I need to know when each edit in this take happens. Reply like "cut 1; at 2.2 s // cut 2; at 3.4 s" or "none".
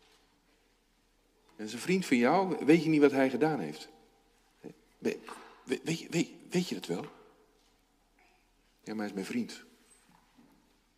none